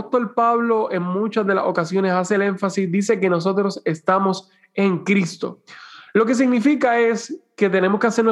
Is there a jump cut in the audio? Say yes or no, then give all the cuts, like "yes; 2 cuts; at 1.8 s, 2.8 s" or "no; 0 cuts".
no; 0 cuts